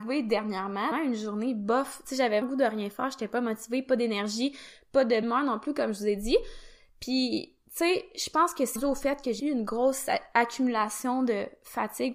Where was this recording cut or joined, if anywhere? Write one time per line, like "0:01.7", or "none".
0:00.9
0:02.4
0:05.2
0:08.8
0:09.4